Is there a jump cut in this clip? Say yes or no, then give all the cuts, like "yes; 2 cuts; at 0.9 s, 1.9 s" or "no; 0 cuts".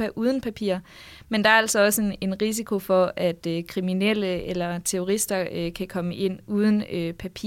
no; 0 cuts